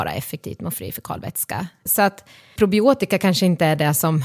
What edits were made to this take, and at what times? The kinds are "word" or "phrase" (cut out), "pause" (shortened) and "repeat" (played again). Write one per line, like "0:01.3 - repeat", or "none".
0:01.9 - word
0:02.6 - word